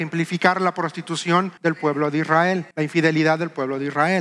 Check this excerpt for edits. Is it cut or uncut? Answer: cut